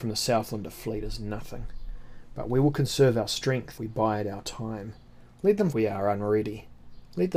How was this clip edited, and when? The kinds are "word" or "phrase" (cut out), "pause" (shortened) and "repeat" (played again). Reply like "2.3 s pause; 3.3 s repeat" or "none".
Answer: 3.8 s word; 5.7 s word